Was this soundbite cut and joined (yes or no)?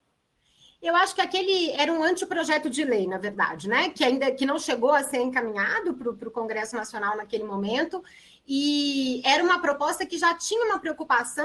no